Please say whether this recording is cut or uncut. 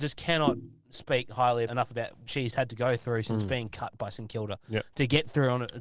cut